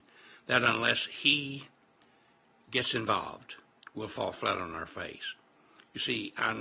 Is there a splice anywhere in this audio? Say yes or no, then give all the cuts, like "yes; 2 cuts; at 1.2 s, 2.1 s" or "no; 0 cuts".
no; 0 cuts